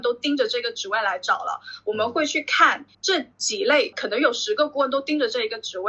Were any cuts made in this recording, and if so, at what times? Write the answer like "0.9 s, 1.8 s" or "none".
2.9 s, 3.9 s